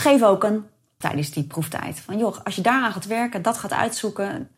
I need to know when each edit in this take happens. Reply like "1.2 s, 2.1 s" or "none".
1.0 s